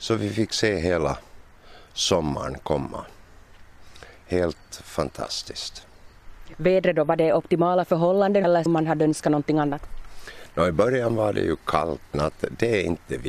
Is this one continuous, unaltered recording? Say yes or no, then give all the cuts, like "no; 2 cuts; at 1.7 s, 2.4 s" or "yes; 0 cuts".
no; 2 cuts; at 8.7 s, 12.1 s